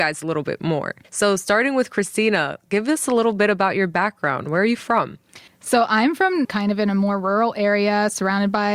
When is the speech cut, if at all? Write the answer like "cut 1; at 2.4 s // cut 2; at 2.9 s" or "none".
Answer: cut 1; at 1.0 s // cut 2; at 5.5 s // cut 3; at 6.4 s

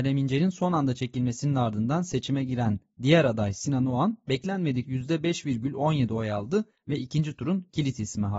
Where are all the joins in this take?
cut 1; at 4.8 s

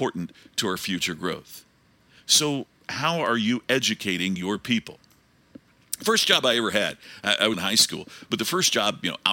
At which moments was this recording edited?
cut 1; at 7.5 s

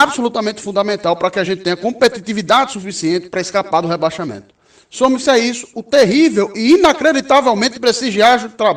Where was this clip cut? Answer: none

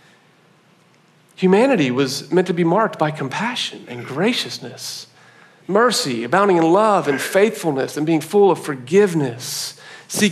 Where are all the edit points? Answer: none

